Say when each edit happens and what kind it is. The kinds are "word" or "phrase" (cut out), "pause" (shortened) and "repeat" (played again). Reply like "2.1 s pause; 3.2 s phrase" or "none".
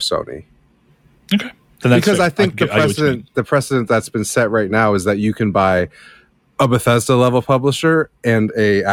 none